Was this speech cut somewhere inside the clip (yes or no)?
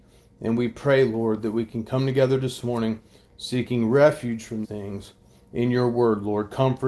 yes